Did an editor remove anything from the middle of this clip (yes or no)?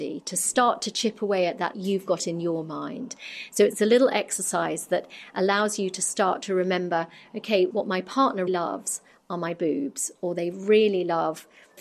yes